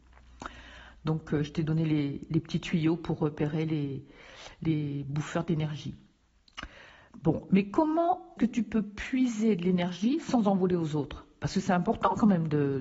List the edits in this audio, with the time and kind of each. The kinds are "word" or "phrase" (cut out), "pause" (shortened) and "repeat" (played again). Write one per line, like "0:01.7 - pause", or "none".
0:08.4 - word